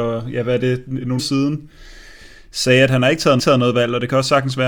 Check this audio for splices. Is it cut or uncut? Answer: cut